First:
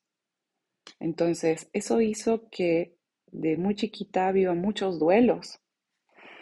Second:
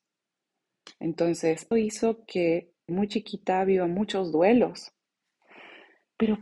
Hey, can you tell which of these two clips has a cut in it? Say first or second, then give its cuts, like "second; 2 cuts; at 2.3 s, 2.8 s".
second; 2 cuts; at 1.7 s, 2.9 s